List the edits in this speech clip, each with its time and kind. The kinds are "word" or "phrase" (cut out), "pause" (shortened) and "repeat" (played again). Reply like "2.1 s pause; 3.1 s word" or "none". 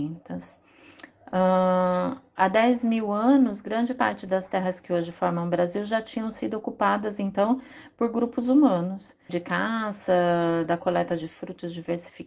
9.3 s phrase